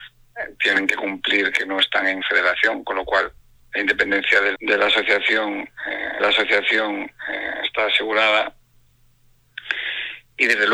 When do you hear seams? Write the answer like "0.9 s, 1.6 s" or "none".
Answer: 2.2 s, 4.5 s, 6.2 s